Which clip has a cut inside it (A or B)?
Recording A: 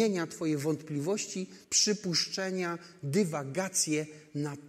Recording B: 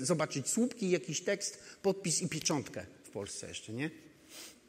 A